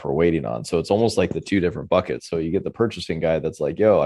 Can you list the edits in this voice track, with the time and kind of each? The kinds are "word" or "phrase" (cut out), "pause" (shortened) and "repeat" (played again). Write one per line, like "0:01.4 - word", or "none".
none